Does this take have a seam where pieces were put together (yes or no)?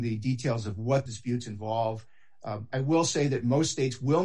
yes